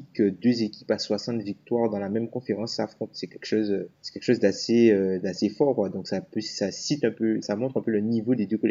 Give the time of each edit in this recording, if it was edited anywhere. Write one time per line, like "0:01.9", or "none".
0:07.4